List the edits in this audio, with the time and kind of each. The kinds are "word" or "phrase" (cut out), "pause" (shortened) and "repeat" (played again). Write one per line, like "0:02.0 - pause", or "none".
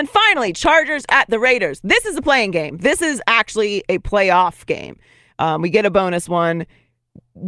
none